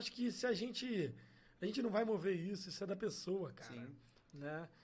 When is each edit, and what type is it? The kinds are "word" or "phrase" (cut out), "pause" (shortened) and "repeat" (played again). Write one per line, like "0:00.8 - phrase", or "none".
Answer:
none